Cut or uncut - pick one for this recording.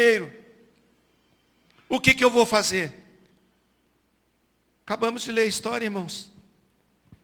uncut